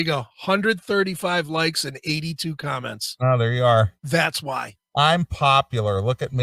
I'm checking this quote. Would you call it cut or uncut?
cut